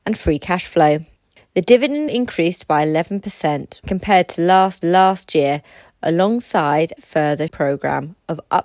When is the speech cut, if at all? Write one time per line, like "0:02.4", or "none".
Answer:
0:01.2
0:02.1
0:03.8
0:04.8
0:07.0
0:07.5